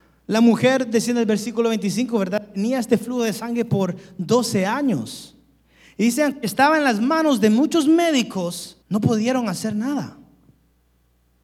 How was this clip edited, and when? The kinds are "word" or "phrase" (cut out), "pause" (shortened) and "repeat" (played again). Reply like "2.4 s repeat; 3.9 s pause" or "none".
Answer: 8.8 s pause